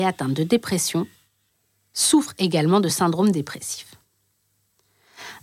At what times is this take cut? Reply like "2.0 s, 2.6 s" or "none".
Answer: none